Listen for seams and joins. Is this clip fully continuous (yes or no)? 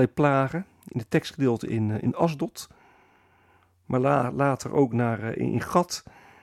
yes